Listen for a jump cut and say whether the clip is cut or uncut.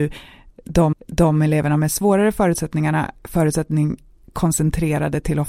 cut